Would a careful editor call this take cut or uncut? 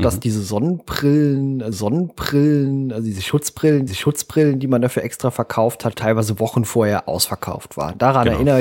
cut